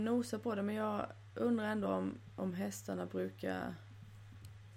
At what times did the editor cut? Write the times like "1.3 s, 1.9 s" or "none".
none